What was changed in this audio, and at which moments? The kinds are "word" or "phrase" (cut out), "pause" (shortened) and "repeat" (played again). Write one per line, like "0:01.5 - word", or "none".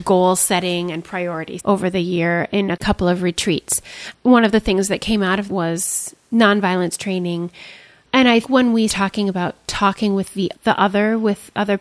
0:01.6 - word
0:05.5 - word
0:08.4 - word
0:08.9 - word

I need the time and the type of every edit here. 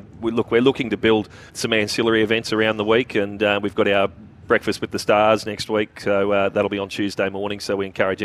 0:01.5 - pause

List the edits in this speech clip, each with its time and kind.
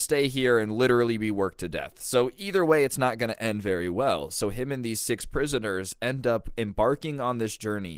none

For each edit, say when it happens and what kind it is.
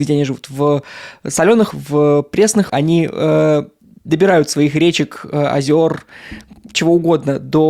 0:01.7 - word
0:02.7 - word
0:04.5 - word

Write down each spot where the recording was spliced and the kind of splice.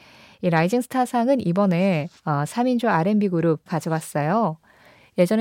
0:02.2 - pause
0:03.7 - word

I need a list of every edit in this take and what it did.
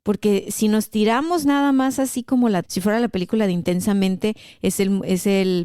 0:02.6 - word

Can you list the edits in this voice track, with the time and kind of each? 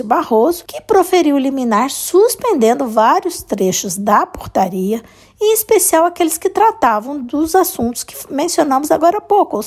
none

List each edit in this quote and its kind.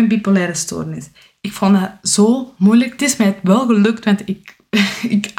0:03.0 - phrase

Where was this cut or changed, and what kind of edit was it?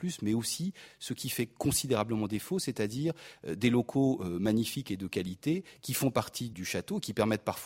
0:06.5 - word

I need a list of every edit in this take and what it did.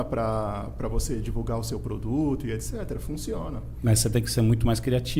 none

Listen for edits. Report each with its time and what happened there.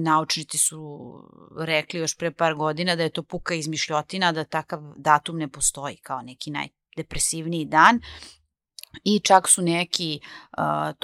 none

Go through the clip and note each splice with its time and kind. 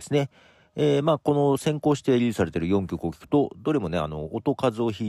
none

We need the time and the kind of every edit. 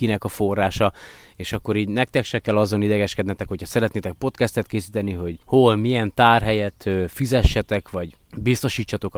0:05.4 - pause

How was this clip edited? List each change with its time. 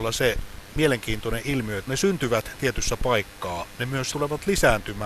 0:01.9 - word
0:04.1 - word

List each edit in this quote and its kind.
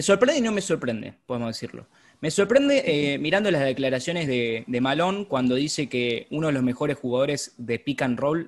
none

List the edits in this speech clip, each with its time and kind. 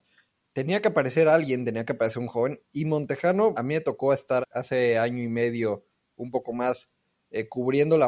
0:03.5 - word
0:04.4 - word

